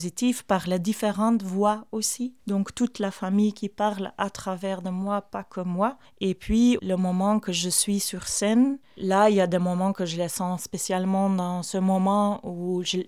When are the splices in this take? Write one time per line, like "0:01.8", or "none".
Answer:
0:06.8
0:08.8
0:10.6